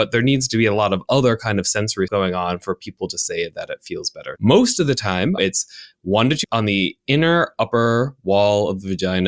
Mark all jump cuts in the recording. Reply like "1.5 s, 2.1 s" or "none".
2.1 s, 4.4 s, 5.4 s, 6.4 s